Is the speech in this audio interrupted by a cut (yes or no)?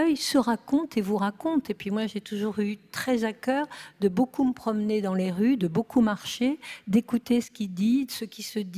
no